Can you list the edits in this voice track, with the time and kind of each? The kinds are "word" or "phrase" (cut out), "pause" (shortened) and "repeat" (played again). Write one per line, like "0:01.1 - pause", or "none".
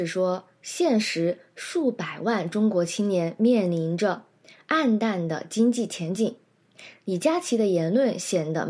none

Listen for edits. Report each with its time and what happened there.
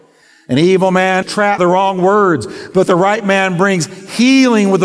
0:01.2 - word
0:01.6 - word

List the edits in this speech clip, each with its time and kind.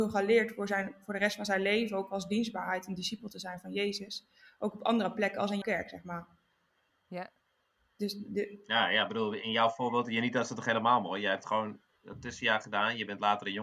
0:05.6 - word

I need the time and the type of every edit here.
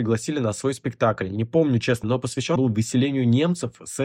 0:02.0 - word
0:02.6 - word

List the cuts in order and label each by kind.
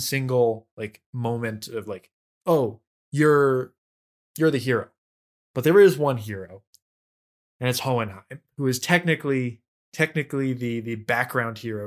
none

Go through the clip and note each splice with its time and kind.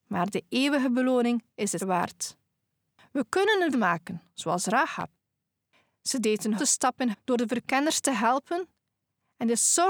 0:01.8 - word
0:03.7 - word
0:06.6 - word
0:07.1 - word

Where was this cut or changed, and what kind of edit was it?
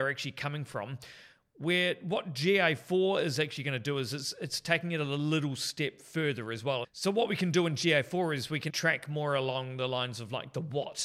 0:08.7 - word

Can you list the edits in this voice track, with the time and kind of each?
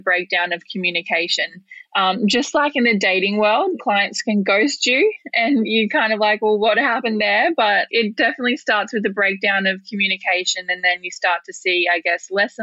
none

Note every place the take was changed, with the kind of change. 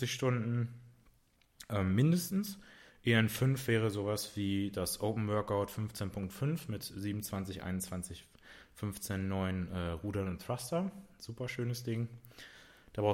none

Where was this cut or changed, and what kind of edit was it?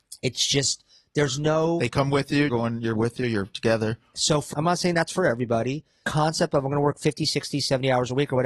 0:02.5 - word
0:02.9 - phrase
0:04.5 - word
0:06.0 - phrase

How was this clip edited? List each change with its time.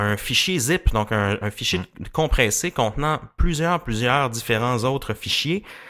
none

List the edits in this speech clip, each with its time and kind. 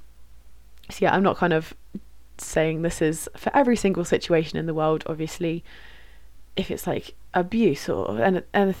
none

